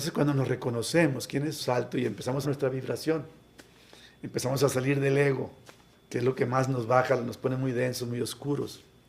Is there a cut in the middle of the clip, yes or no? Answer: yes